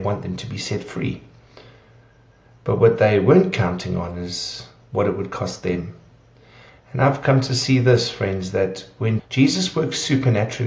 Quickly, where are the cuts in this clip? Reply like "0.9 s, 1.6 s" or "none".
9.2 s